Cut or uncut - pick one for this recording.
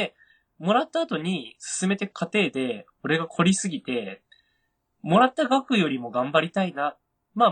uncut